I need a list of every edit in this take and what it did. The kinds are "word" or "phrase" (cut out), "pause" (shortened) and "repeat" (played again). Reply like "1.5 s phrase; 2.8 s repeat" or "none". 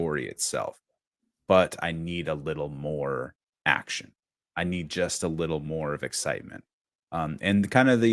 none